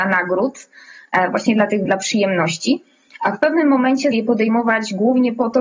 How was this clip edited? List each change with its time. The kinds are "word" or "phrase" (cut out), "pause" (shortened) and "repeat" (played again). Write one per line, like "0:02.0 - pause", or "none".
0:01.9 - word
0:04.1 - word